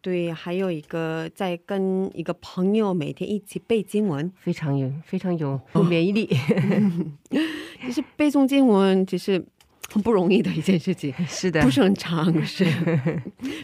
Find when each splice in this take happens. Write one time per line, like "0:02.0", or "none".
0:04.4
0:05.8